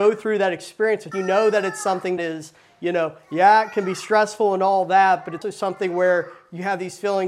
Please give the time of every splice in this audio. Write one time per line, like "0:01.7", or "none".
0:01.1
0:02.2
0:05.4